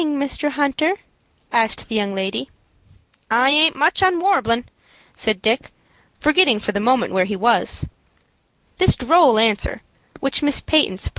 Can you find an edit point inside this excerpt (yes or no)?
no